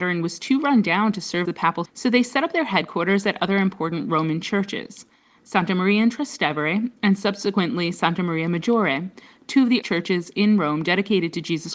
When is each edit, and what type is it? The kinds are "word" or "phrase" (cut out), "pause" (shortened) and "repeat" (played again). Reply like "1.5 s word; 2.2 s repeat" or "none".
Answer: 1.5 s word; 1.9 s word; 9.8 s word